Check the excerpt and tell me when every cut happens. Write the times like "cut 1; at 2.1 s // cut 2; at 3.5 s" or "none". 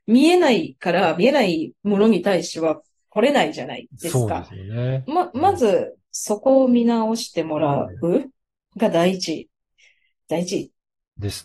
cut 1; at 6.0 s